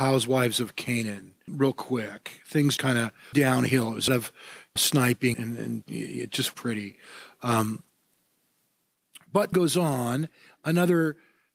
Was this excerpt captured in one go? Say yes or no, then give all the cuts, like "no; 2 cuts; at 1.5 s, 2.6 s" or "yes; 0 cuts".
no; 9 cuts; at 1.5 s, 2.8 s, 3.3 s, 4.1 s, 4.8 s, 5.3 s, 5.8 s, 6.5 s, 9.5 s